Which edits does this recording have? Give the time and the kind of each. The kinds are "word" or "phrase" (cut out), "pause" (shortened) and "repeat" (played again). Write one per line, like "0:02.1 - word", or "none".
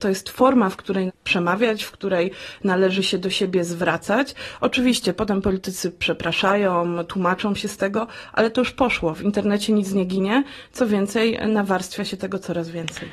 0:01.1 - word